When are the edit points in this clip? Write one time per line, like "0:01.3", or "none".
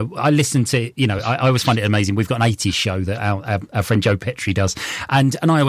none